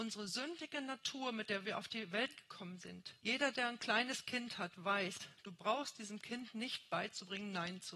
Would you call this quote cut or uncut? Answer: cut